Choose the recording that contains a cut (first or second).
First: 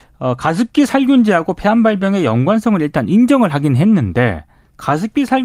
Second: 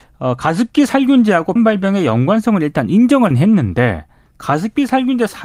second